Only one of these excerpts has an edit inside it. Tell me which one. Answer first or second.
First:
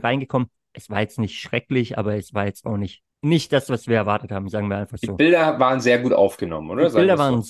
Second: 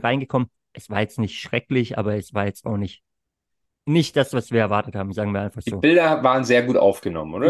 first